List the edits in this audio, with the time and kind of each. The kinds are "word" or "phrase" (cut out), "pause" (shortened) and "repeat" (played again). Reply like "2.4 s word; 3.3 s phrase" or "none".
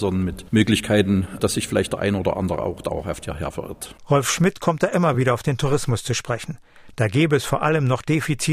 none